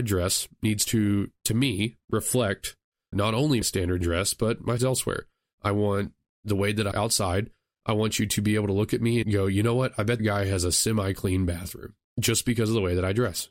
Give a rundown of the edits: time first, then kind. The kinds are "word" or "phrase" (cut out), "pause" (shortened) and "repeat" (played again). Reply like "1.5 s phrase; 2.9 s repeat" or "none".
3.1 s word; 3.6 s word; 4.0 s word; 4.8 s word; 6.9 s word; 9.2 s word; 10.2 s word; 12.1 s word